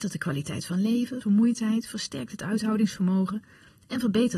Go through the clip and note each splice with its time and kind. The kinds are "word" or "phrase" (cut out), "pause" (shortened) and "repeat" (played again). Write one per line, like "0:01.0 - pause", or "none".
0:01.2 - word